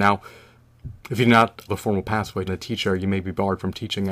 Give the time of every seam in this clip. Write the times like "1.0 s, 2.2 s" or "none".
1.0 s, 1.7 s, 2.5 s